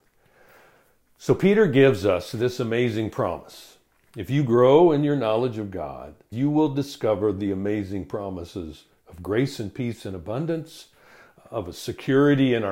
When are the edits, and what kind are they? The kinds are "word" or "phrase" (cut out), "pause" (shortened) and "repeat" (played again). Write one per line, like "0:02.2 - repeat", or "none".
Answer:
0:06.3 - word